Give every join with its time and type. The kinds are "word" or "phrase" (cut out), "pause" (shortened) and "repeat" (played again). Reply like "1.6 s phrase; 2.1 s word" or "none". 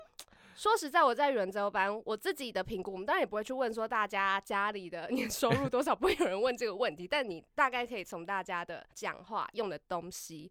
8.9 s pause